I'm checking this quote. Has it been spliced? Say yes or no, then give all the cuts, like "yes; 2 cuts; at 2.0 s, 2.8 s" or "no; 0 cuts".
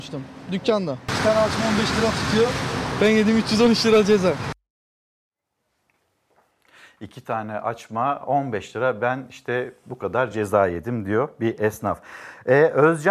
no; 0 cuts